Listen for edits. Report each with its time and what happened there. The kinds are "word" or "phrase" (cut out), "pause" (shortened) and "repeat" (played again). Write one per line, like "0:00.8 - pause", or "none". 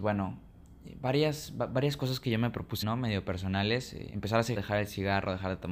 0:02.8 - word
0:04.6 - word

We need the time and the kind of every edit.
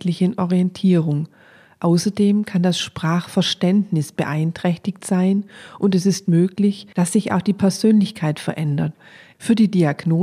none

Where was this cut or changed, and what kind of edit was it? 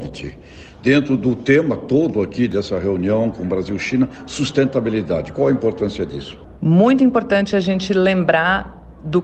none

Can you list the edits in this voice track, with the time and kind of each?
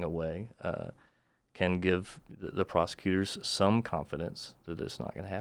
none

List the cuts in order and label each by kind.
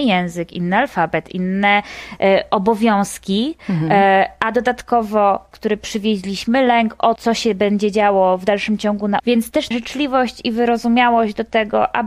0:05.5 - word
0:07.2 - word
0:09.2 - word
0:09.7 - word

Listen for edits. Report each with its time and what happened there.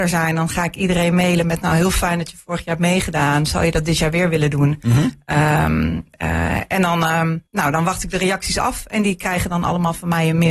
0:07.5 - pause

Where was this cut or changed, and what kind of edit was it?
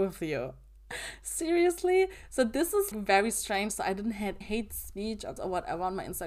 0:02.9 - word
0:04.4 - word
0:05.4 - word

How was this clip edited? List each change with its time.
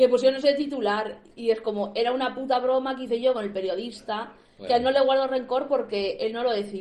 none

